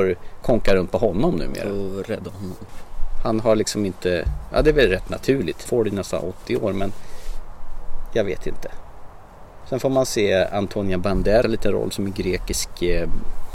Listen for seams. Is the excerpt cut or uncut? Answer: cut